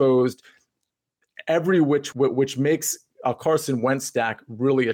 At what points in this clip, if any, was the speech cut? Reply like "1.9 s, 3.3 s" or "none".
2.1 s